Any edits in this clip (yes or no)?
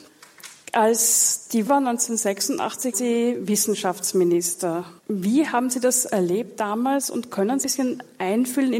yes